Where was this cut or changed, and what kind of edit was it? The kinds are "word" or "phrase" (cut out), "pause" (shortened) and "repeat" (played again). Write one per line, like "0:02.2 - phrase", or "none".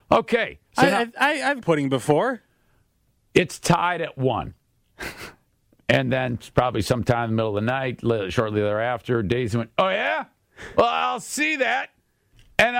0:01.6 - word

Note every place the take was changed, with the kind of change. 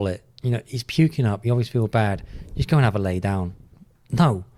none

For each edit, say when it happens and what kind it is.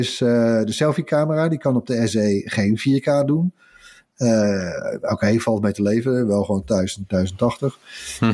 none

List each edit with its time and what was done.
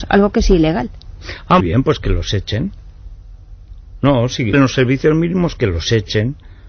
0:01.6 - word
0:04.5 - phrase

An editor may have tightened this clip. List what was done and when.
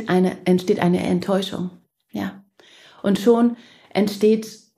none

